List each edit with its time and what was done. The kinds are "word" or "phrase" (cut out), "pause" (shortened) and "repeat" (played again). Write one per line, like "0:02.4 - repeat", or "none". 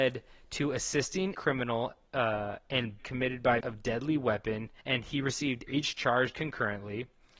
0:01.3 - word
0:03.0 - word
0:03.6 - word
0:04.8 - pause
0:05.7 - phrase
0:06.3 - phrase